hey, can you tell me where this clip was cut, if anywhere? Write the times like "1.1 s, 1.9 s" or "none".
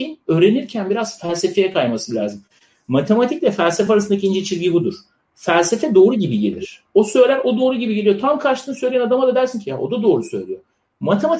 none